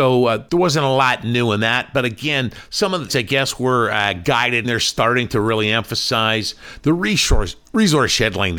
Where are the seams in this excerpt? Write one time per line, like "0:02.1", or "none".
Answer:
0:03.1
0:04.6